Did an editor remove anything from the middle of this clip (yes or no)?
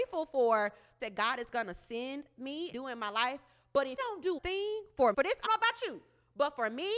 yes